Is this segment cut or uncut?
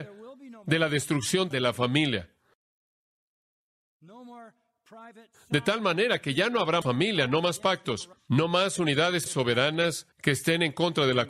cut